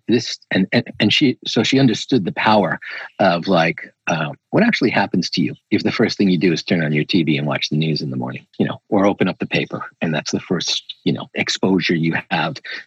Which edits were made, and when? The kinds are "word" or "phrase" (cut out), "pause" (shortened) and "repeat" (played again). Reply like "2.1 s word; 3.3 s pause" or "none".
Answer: 5.6 s pause; 8.5 s pause